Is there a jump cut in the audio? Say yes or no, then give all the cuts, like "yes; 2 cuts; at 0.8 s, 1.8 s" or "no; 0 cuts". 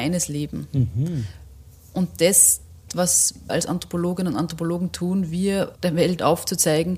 yes; 3 cuts; at 2.9 s, 3.5 s, 5.7 s